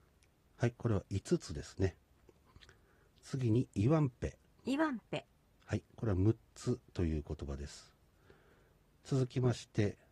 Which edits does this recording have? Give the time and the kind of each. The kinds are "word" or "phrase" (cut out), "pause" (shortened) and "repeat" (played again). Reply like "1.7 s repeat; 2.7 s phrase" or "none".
none